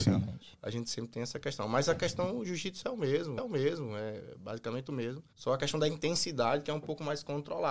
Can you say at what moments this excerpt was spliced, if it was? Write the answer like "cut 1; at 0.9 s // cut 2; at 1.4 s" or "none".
cut 1; at 3.4 s // cut 2; at 5.3 s